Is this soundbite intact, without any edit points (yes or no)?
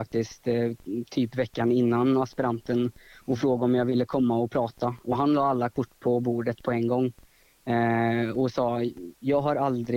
yes